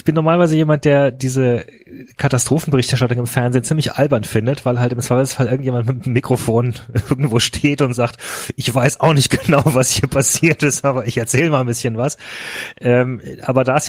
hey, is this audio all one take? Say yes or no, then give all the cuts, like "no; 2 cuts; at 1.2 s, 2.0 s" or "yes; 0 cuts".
yes; 0 cuts